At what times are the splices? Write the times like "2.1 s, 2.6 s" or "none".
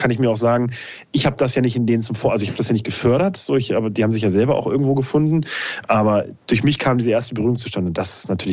6.4 s

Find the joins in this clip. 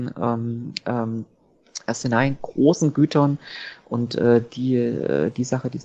none

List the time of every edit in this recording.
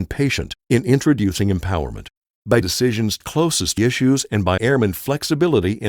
2.6 s, 3.2 s, 3.8 s, 4.6 s

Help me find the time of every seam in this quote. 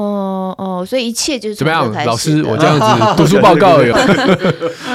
3.9 s

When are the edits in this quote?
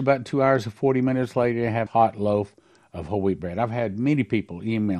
1.9 s

